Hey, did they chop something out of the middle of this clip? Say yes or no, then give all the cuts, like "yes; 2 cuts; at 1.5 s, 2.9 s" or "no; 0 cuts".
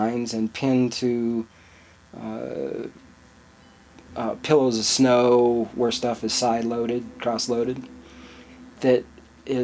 yes; 1 cut; at 8.7 s